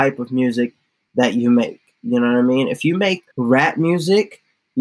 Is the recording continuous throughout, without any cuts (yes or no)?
no